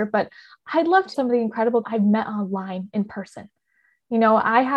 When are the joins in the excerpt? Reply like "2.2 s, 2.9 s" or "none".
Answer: 1.1 s, 1.8 s